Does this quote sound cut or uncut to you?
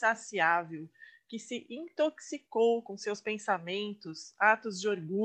uncut